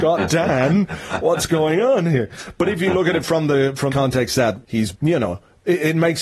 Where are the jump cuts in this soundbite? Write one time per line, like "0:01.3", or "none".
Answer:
0:03.9
0:04.6
0:04.9